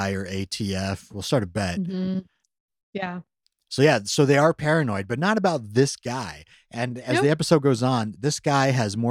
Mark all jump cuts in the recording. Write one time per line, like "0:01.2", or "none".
none